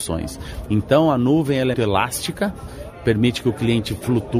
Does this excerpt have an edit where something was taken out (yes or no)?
yes